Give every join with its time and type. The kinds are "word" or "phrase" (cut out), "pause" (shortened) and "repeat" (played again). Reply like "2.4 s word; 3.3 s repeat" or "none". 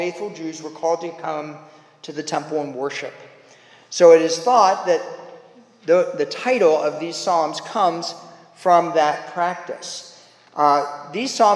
none

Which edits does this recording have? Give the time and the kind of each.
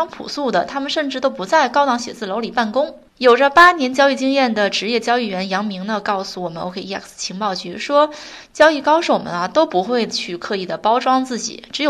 3.1 s pause

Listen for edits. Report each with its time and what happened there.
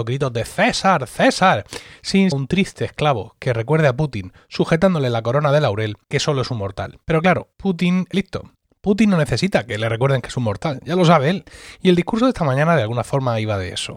2.3 s word; 6.0 s pause; 7.0 s pause; 7.5 s pause; 8.1 s word

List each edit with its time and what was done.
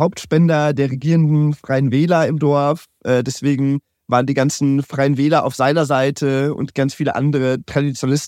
none

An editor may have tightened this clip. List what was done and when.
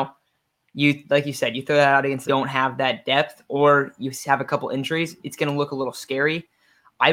2.3 s phrase

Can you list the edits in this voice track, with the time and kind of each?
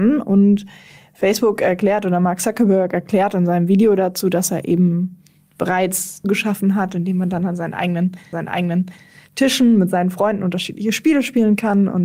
6.2 s phrase; 8.3 s repeat

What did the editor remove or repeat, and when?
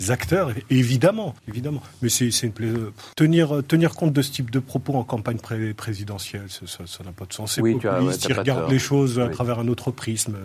1.4 s pause; 3.1 s pause

